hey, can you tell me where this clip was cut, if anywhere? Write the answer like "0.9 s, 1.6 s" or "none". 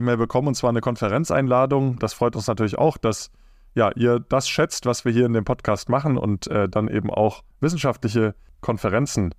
none